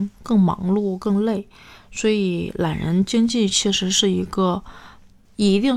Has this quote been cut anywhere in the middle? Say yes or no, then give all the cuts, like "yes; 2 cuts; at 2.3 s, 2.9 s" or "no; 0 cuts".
no; 0 cuts